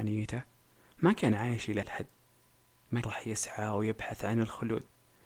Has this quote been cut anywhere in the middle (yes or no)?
yes